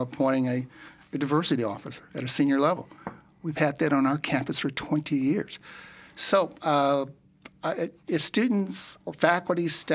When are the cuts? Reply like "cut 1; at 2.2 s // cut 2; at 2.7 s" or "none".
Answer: cut 1; at 8.0 s

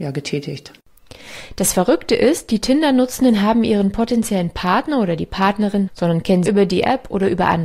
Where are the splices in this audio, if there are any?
cut 1; at 5.9 s // cut 2; at 6.5 s

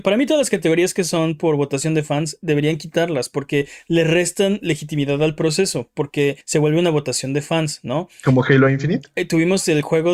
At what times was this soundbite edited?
cut 1; at 6.4 s

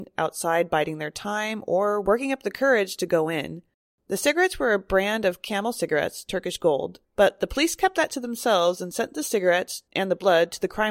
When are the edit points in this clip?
cut 1; at 3.7 s // cut 2; at 7.0 s // cut 3; at 9.9 s

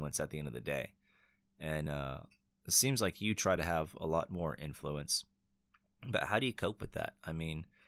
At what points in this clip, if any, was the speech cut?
none

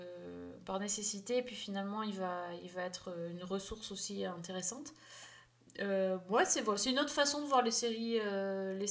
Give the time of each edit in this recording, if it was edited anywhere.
none

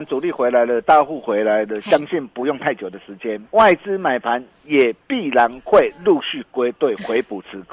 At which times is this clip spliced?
cut 1; at 3.5 s // cut 2; at 5.0 s

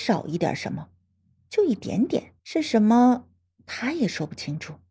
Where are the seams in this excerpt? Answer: cut 1; at 2.4 s

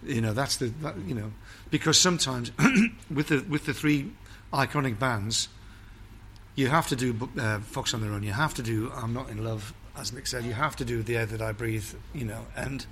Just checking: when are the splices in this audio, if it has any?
none

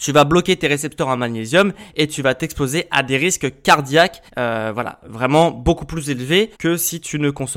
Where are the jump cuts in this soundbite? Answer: cut 1; at 4.3 s // cut 2; at 6.5 s

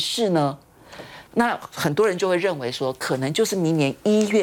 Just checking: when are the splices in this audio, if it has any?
cut 1; at 1.3 s

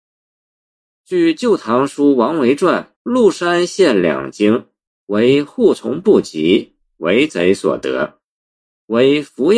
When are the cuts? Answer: cut 1; at 3.0 s // cut 2; at 4.9 s

